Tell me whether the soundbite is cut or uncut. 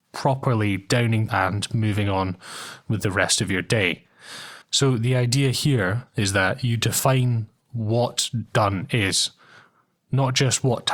cut